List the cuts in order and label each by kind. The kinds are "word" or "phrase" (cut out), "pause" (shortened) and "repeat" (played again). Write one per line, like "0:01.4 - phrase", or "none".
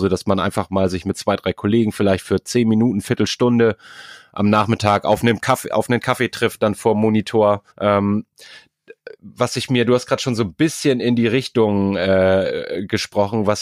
0:07.7 - pause

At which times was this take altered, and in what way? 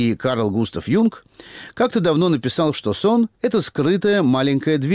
0:03.3 - pause

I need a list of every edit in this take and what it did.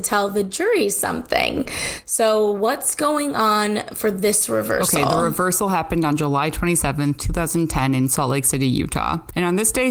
none

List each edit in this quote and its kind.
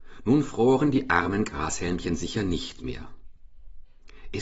none

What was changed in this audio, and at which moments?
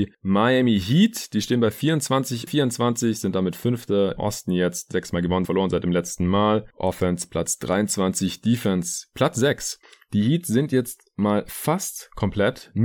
0:02.5 - word
0:04.2 - word
0:05.4 - word

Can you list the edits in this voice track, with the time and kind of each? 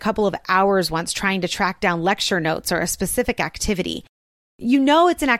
none

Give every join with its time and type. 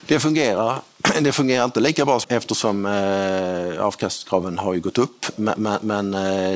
0:02.2 - word

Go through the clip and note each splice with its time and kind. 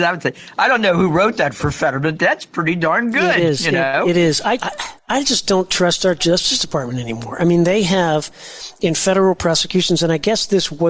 0:04.6 - word
0:05.0 - pause

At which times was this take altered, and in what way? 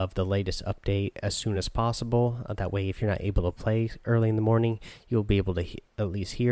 none

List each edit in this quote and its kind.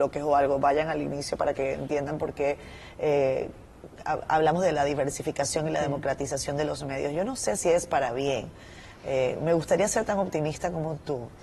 none

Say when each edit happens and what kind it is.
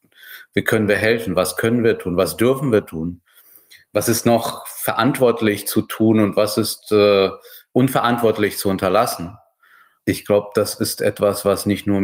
none

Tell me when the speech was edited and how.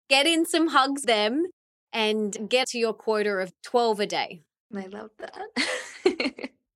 0:01.0 - word
0:02.6 - word

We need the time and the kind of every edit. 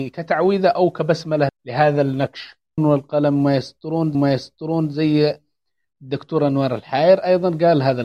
0:01.5 - word
0:02.8 - phrase
0:04.1 - repeat

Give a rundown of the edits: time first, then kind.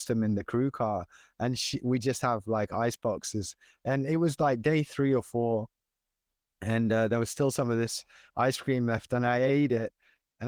none

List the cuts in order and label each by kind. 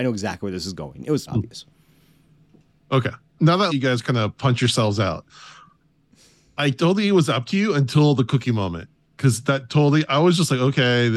0:01.3 - word
0:03.4 - word
0:03.7 - word

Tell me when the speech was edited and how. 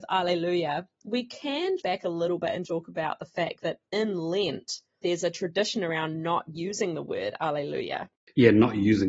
0:01.8 - word
0:02.6 - word
0:05.0 - word

